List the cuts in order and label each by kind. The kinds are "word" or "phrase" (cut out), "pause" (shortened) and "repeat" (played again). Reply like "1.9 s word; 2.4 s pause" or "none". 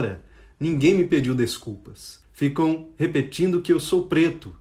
2.2 s pause